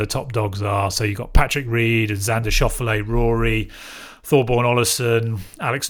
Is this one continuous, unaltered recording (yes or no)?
yes